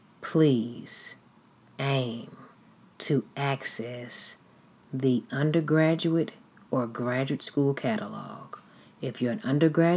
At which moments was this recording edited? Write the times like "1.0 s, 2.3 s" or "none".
none